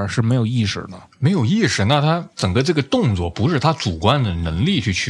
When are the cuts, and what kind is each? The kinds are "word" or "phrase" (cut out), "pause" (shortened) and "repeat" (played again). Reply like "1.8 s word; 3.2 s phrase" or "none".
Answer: 2.3 s pause